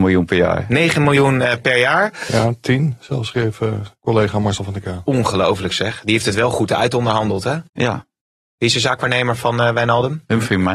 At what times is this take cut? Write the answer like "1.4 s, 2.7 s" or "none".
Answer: 4.0 s, 7.7 s